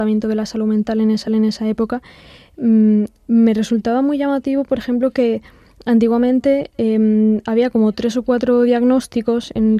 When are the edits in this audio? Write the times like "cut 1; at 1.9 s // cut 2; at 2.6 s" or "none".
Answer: cut 1; at 1.3 s